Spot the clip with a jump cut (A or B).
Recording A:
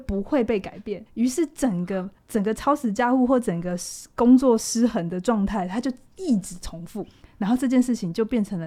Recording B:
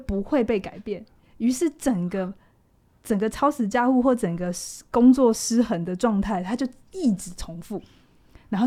A